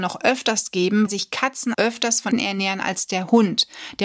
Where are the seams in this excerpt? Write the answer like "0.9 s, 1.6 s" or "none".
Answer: 1.1 s, 1.7 s, 2.3 s